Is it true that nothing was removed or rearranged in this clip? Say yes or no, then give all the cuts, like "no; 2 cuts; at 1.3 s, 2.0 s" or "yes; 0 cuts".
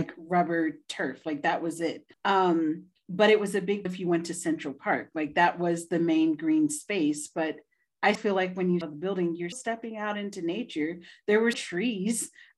no; 6 cuts; at 2.1 s, 3.9 s, 8.2 s, 8.8 s, 9.5 s, 11.5 s